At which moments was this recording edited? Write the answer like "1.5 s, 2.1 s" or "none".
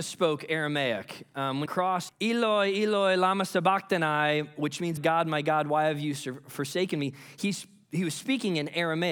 1.7 s, 2.1 s, 5.0 s